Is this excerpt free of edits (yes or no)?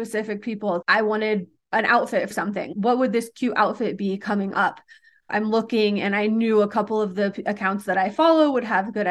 no